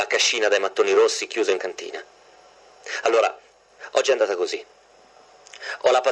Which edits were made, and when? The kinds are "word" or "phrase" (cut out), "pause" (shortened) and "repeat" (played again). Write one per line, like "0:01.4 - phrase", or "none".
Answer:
0:01.6 - word